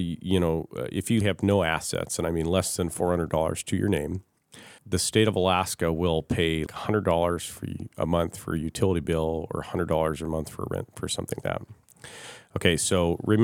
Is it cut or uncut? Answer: cut